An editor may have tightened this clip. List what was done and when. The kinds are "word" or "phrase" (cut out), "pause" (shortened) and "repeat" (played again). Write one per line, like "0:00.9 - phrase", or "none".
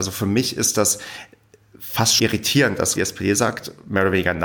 0:02.2 - word
0:03.0 - word